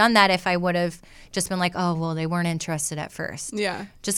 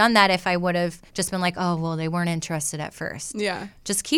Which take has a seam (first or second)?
second